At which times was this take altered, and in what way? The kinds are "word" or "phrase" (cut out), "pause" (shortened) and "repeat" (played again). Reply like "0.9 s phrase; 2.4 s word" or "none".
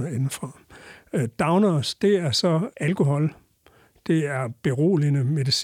none